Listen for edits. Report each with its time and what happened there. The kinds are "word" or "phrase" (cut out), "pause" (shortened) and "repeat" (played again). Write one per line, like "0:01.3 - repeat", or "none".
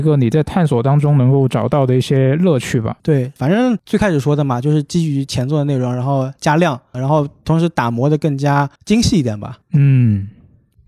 0:03.0 - pause
0:06.9 - phrase
0:08.8 - pause
0:09.6 - pause